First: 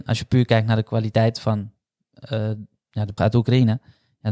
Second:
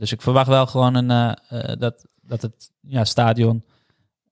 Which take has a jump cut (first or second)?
first